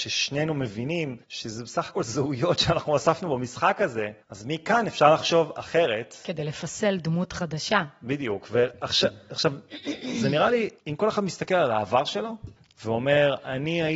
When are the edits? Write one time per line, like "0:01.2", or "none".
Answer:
0:01.2
0:04.2
0:10.8
0:12.6